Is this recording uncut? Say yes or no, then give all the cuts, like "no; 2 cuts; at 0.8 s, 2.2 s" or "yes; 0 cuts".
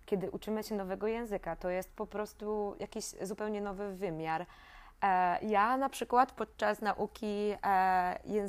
yes; 0 cuts